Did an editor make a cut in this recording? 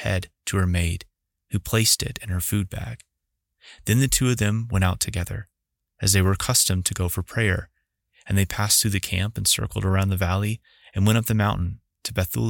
no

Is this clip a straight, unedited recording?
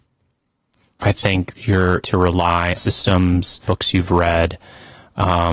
no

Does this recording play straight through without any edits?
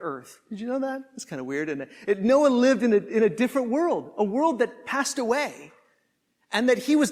yes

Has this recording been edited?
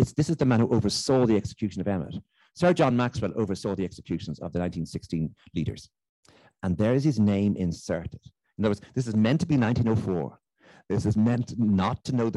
no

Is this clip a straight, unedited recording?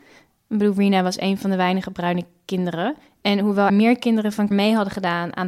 no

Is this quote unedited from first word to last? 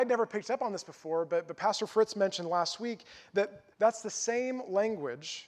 no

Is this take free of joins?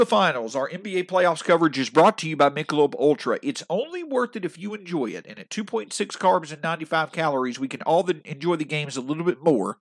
yes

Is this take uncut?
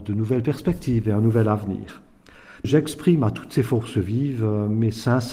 yes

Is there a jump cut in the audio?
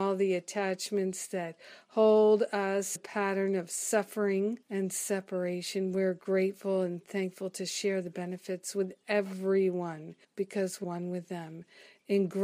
yes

